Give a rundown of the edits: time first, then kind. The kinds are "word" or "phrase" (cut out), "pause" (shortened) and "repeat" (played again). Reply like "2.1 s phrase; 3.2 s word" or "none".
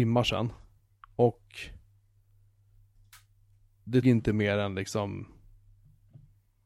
4.0 s word